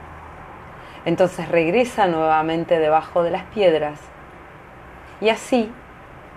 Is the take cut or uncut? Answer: uncut